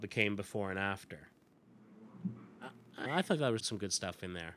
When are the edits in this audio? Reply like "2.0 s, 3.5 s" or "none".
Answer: 3.0 s, 3.6 s